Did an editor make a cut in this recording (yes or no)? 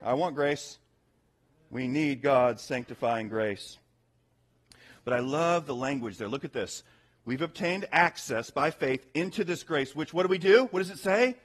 no